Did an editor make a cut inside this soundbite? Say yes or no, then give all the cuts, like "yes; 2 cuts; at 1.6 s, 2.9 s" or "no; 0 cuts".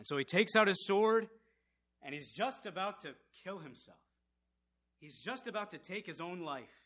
no; 0 cuts